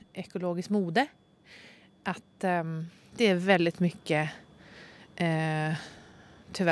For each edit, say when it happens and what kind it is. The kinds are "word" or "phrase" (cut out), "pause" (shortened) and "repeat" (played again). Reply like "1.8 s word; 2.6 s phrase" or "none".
none